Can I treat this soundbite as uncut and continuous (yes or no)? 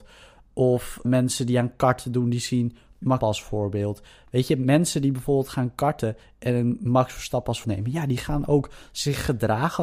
no